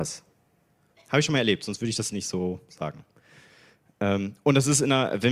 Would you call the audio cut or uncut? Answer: uncut